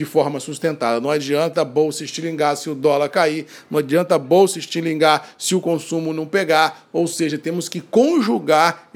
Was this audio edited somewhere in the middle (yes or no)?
no